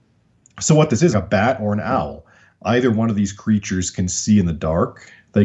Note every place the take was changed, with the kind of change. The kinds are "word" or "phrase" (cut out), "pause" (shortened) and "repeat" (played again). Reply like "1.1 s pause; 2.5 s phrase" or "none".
1.1 s word